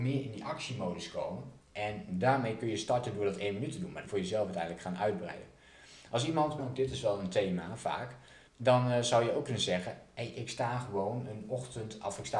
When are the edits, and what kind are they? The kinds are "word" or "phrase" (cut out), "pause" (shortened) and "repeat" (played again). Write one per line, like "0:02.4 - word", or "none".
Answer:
0:01.6 - pause
0:04.0 - phrase
0:06.6 - phrase
0:08.5 - pause